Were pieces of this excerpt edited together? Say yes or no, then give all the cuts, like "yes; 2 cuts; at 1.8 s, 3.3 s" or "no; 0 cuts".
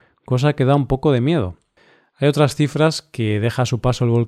no; 0 cuts